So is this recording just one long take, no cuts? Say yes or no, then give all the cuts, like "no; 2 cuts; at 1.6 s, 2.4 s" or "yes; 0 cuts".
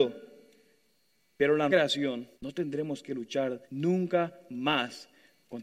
no; 3 cuts; at 1.7 s, 2.3 s, 3.6 s